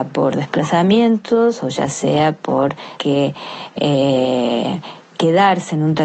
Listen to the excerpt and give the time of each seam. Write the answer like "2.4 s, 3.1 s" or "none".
3.0 s